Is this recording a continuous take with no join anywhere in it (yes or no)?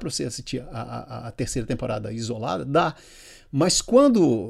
yes